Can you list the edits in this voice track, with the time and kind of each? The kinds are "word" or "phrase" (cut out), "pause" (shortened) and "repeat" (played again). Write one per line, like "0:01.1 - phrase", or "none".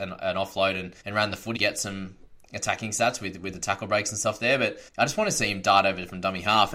0:01.0 - pause
0:01.6 - phrase
0:04.9 - pause